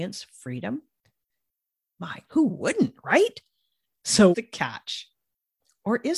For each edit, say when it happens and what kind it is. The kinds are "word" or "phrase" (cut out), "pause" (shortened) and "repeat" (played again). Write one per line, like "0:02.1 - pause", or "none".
0:02.3 - word
0:04.3 - word